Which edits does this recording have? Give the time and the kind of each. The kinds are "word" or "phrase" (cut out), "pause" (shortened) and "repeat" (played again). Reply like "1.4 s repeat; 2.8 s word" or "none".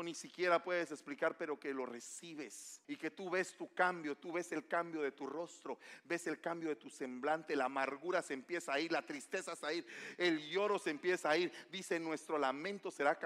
2.8 s pause; 9.6 s word